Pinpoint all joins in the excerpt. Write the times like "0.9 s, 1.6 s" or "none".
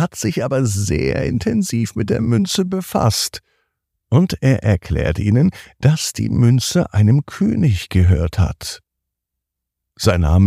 none